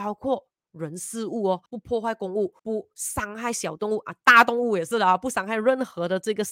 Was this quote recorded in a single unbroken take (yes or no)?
no